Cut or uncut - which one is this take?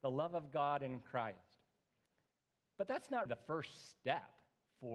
cut